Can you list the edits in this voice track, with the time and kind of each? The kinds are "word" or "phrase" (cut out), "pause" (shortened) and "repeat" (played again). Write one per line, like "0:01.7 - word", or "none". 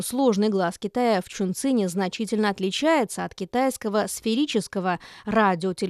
none